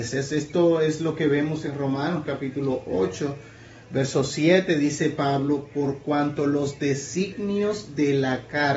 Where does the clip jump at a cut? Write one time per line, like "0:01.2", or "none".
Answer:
none